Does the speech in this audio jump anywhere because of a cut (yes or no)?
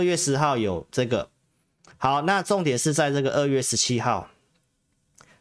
no